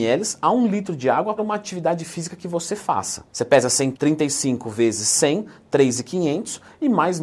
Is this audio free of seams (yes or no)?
no